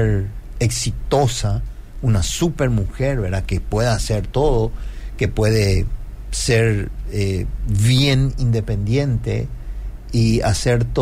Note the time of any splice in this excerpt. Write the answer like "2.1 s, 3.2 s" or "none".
none